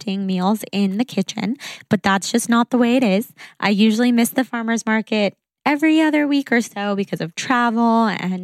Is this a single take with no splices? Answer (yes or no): yes